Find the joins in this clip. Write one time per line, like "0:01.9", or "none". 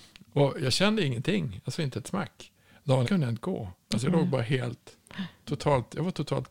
0:03.0